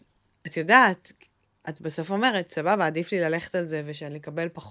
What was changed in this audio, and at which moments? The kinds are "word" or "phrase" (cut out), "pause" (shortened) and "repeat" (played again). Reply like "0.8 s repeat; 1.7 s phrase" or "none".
none